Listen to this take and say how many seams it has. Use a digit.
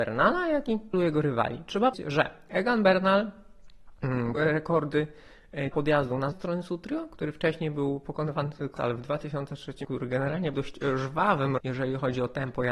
9